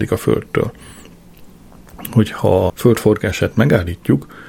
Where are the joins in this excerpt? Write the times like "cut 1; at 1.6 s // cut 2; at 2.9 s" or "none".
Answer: cut 1; at 2.7 s

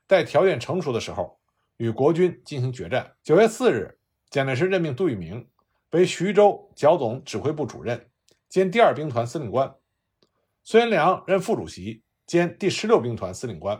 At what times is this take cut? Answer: cut 1; at 3.2 s

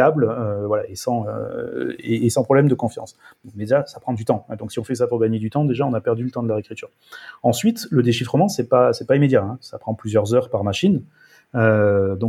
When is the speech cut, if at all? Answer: none

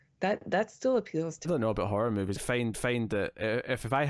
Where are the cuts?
cut 1; at 1.4 s // cut 2; at 2.4 s // cut 3; at 2.7 s

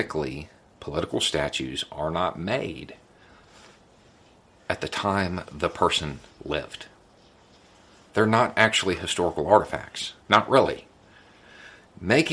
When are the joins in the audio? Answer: cut 1; at 10.2 s

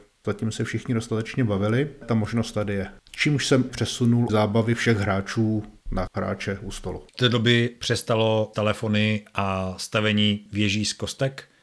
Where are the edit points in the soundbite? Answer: cut 1; at 2.0 s // cut 2; at 3.7 s // cut 3; at 4.3 s // cut 4; at 6.1 s // cut 5; at 7.1 s // cut 6; at 8.5 s

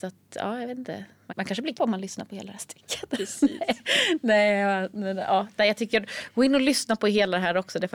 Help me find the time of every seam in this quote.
cut 1; at 1.3 s // cut 2; at 1.7 s

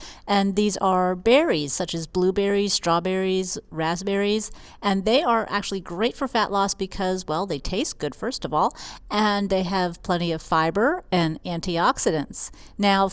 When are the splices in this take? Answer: none

